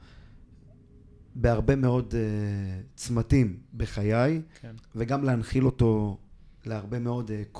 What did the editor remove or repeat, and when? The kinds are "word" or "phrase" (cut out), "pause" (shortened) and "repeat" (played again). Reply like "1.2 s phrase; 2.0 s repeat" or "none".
1.3 s pause; 4.5 s pause; 6.6 s pause